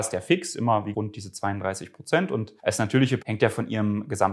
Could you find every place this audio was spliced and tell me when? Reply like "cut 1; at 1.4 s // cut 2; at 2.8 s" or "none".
cut 1; at 0.9 s // cut 2; at 2.6 s // cut 3; at 3.2 s